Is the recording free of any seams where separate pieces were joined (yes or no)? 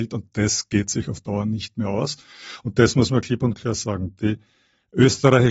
yes